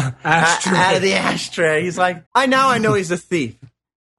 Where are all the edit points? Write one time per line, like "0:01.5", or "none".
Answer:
0:02.3